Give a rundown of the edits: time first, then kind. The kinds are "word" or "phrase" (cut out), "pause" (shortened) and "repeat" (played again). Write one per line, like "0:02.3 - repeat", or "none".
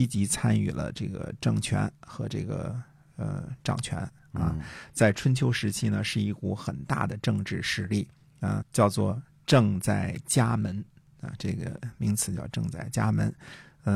0:08.6 - word